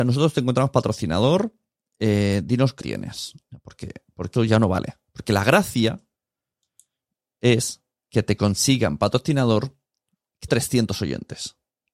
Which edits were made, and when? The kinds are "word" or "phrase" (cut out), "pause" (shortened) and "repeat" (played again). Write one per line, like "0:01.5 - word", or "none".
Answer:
0:01.8 - pause
0:02.8 - word
0:04.4 - word
0:10.5 - word